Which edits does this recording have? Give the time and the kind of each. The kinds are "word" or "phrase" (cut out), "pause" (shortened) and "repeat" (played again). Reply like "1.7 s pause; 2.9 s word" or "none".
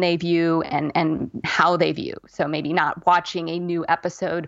1.4 s word